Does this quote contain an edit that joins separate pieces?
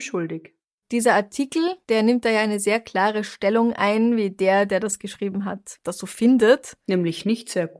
no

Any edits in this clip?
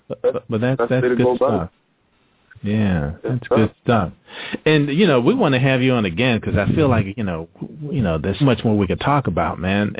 yes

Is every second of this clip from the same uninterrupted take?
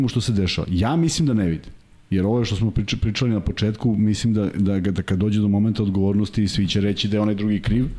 yes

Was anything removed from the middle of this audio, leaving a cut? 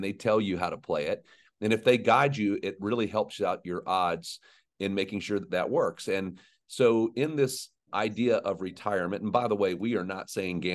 no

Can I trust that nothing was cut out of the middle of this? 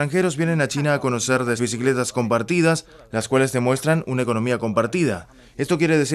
no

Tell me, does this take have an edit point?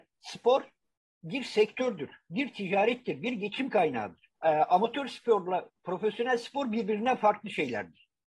yes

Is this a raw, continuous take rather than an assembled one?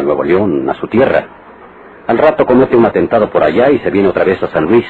yes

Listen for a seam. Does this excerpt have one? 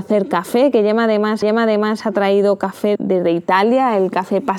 yes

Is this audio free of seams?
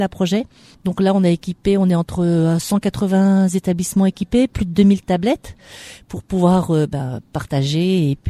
yes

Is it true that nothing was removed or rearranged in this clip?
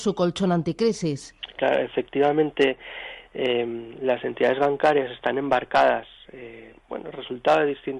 no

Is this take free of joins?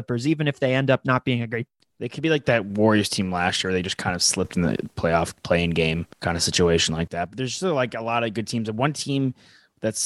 no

